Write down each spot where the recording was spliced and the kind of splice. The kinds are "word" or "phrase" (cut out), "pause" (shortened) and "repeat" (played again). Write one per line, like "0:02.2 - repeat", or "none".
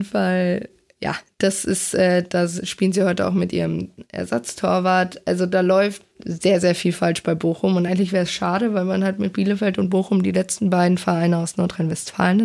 none